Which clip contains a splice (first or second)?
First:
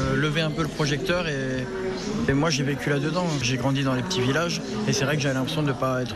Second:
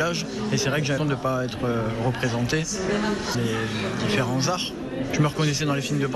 second